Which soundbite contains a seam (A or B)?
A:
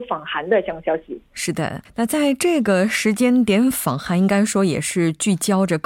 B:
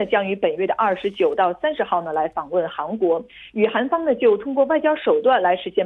A